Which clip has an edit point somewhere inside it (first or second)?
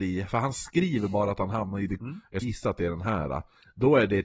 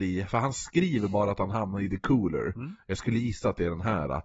first